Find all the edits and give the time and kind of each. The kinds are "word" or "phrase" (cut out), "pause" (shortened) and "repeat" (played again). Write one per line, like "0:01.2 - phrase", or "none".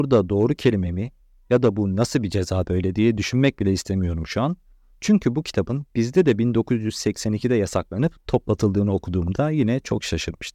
none